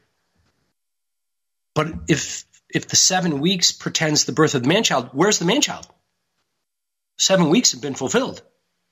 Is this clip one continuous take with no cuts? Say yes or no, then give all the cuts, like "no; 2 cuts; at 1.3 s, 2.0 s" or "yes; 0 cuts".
yes; 0 cuts